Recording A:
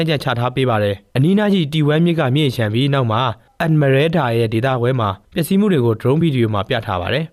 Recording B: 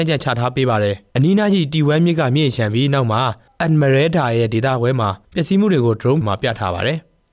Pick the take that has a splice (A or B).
B